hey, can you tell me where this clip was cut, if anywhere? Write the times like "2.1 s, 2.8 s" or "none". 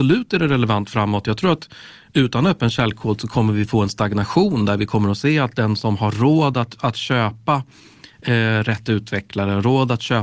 none